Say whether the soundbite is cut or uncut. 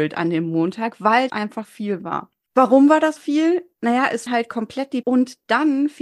cut